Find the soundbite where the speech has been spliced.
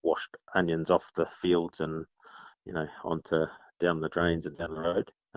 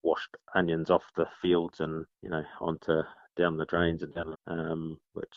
second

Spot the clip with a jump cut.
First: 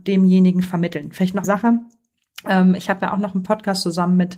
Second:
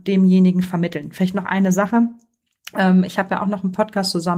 first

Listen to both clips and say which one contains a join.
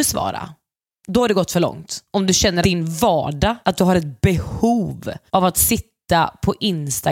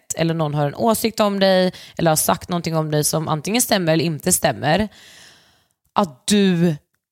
first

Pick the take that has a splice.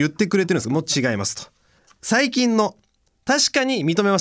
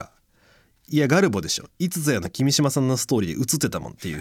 first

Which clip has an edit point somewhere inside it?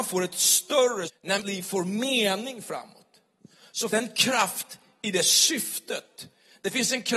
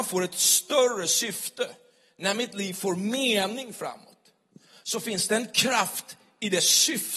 first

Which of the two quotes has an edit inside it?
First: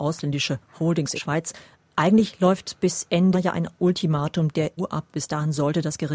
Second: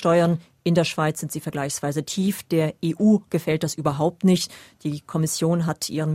first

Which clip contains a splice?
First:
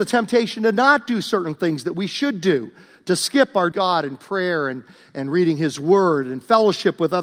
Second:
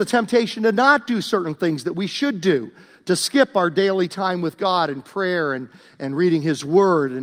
first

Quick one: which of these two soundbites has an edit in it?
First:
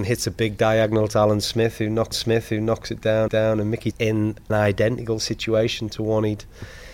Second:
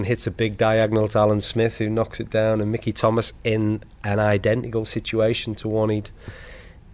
first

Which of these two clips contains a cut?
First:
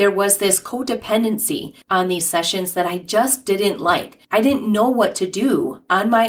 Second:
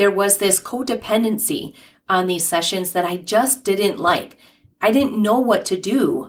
first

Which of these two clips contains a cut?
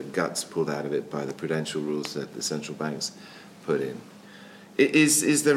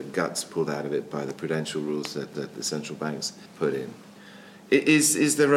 second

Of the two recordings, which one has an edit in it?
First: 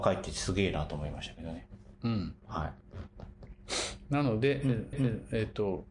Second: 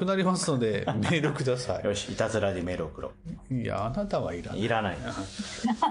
first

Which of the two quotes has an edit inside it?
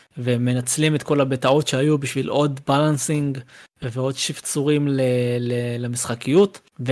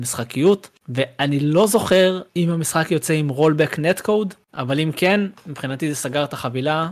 second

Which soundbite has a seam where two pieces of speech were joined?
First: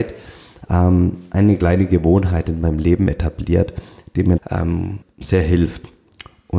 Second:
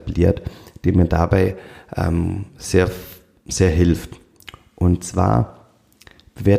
first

